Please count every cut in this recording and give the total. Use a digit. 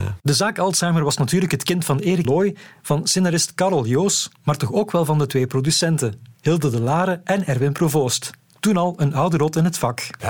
1